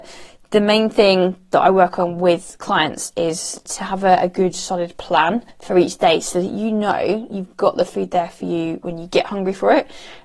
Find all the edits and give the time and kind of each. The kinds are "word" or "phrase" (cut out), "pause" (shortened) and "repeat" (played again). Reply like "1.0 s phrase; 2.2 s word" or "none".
5.5 s pause